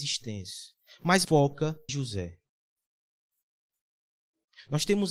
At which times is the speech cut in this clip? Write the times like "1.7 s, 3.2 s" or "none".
1.2 s, 1.9 s